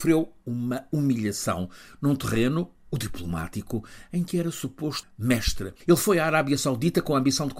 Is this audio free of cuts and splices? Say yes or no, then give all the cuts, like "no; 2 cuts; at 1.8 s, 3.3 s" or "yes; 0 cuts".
no; 1 cut; at 5.0 s